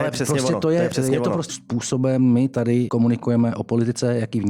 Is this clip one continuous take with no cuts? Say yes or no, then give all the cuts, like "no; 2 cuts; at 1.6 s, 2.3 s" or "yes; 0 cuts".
no; 2 cuts; at 1.5 s, 2.9 s